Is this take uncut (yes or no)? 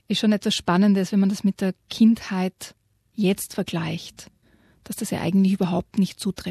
yes